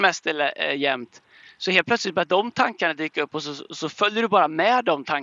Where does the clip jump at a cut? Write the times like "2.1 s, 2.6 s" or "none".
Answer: none